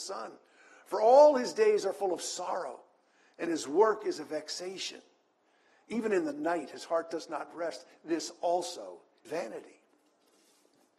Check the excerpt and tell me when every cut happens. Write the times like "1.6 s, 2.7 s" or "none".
9.2 s